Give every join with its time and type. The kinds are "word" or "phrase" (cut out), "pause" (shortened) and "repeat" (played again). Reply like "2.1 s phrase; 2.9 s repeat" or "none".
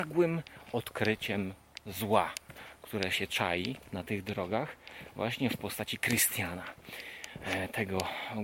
none